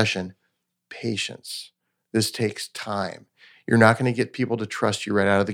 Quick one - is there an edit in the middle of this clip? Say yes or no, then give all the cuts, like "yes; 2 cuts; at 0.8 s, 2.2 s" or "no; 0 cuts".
no; 0 cuts